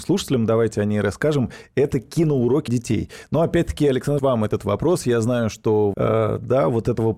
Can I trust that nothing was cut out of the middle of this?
no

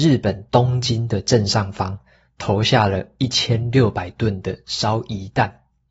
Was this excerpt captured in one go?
yes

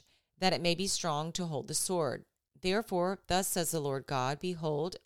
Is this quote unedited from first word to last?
yes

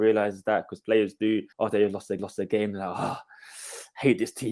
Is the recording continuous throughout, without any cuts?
no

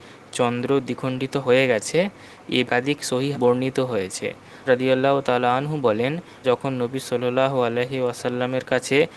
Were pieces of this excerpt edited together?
yes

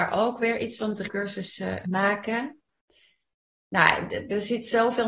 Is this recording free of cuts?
no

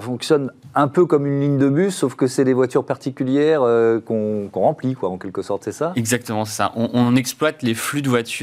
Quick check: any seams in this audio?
no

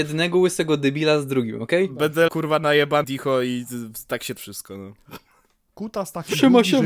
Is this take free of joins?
no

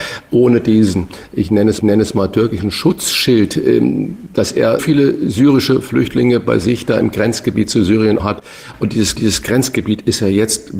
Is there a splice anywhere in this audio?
yes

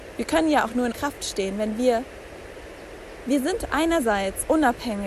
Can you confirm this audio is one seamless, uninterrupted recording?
no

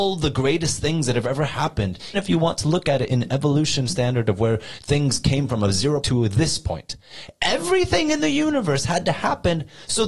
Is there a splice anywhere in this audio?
yes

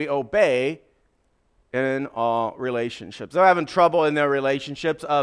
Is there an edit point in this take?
no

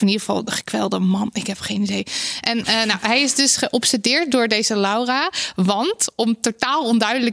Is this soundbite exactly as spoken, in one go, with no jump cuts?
yes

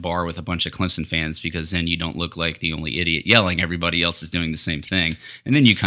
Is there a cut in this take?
no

